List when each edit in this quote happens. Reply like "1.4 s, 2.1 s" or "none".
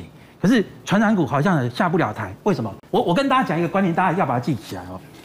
2.9 s